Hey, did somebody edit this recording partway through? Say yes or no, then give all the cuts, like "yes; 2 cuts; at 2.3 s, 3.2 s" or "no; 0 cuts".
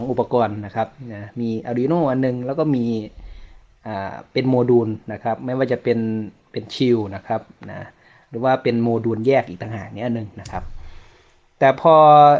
no; 0 cuts